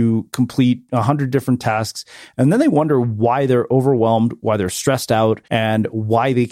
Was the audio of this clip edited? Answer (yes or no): yes